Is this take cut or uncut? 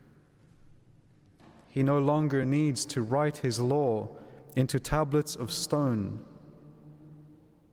uncut